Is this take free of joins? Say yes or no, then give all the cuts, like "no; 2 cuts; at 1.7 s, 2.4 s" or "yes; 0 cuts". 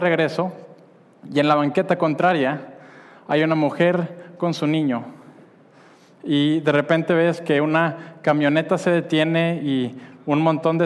yes; 0 cuts